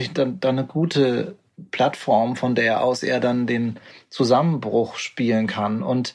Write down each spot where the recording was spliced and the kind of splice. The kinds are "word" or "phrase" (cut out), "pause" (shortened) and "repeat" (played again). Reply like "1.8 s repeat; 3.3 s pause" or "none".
none